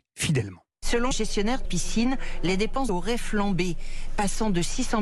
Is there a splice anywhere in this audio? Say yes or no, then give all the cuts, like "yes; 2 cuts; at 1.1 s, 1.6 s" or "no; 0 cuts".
yes; 3 cuts; at 1.1 s, 1.6 s, 2.9 s